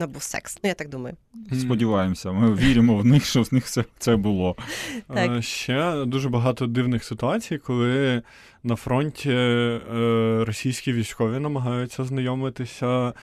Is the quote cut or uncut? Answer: uncut